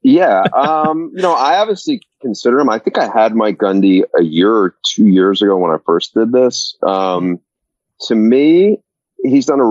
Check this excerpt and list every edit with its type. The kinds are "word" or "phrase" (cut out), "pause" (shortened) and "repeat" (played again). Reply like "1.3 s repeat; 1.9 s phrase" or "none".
none